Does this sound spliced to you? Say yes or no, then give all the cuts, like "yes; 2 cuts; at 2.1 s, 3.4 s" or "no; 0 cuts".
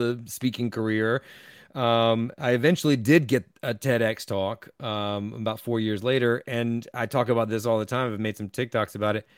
no; 0 cuts